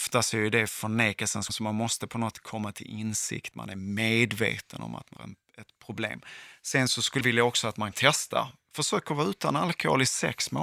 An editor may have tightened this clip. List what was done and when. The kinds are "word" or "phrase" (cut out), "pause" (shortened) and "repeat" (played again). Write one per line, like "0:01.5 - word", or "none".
0:01.5 - word
0:02.3 - word
0:03.5 - word
0:05.2 - word
0:07.2 - word
0:07.9 - word